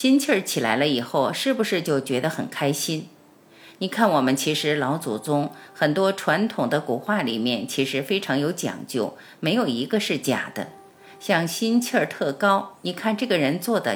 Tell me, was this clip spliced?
no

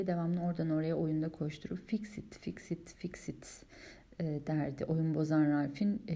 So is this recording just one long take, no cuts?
yes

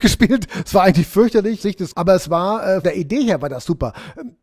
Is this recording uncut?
no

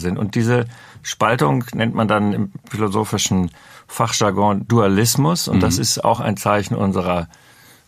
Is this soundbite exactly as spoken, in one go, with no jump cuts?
yes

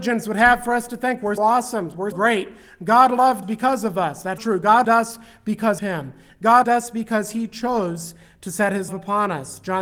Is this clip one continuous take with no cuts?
no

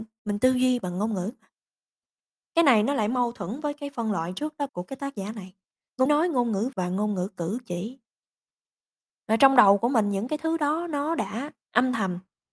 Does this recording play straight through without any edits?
no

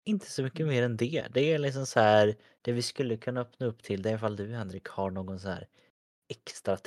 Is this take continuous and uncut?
yes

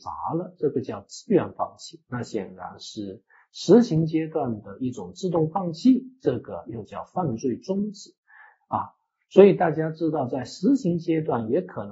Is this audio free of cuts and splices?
yes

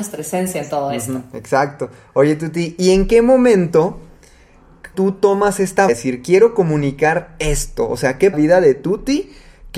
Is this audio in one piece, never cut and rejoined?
no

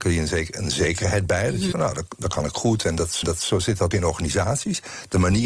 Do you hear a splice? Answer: yes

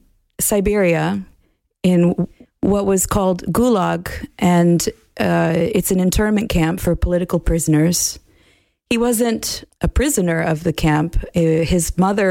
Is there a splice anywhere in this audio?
no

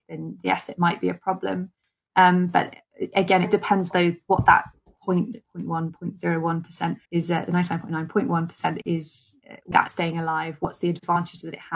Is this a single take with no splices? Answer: no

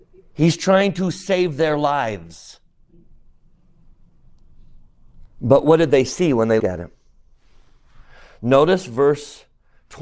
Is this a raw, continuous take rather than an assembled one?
no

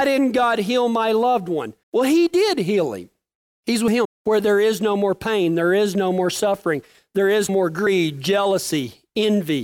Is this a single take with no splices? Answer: no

